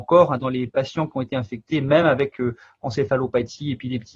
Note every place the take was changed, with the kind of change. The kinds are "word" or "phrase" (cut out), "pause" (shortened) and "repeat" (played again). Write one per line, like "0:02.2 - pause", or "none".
none